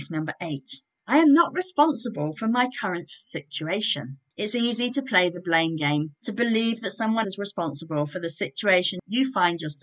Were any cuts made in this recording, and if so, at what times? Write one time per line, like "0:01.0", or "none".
0:06.2
0:07.2